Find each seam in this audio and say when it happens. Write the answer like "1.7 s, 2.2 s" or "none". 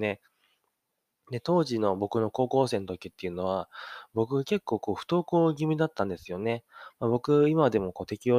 none